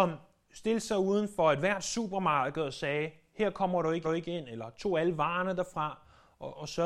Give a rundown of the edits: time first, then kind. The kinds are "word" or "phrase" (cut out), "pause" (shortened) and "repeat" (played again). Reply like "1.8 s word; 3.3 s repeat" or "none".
4.0 s repeat